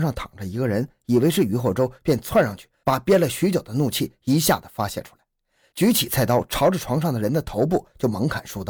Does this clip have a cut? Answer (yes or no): no